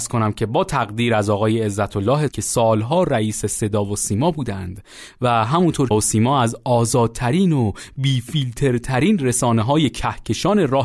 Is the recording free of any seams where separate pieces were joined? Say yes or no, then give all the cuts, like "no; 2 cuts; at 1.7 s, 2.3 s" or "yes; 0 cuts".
no; 2 cuts; at 2.3 s, 5.9 s